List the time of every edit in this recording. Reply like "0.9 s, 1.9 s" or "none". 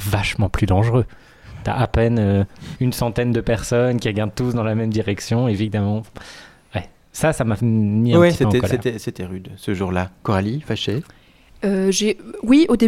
2.7 s